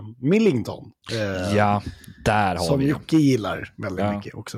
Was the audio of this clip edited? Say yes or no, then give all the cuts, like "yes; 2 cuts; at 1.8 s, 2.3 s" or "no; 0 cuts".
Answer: no; 0 cuts